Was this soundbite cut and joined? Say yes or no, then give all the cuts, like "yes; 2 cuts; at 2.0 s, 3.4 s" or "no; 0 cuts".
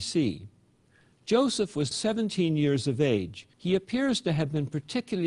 yes; 2 cuts; at 1.9 s, 3.5 s